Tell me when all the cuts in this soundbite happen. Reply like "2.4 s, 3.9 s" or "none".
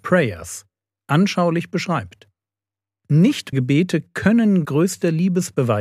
3.5 s, 4.6 s